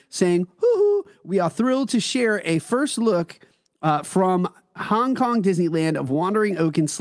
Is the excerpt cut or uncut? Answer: uncut